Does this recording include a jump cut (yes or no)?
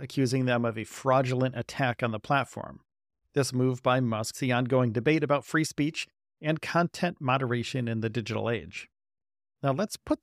yes